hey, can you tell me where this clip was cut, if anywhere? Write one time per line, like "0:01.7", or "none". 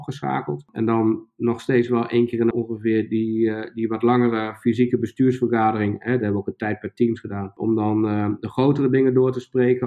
0:02.5